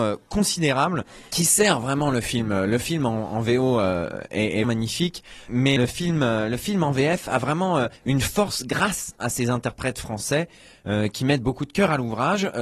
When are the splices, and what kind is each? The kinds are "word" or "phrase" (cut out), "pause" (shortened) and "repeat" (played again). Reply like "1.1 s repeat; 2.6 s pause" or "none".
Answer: 4.6 s word; 5.8 s word; 8.0 s pause